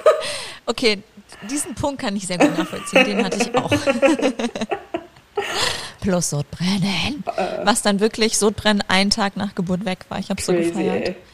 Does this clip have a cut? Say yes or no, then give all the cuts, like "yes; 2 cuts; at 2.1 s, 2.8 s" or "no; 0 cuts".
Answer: no; 0 cuts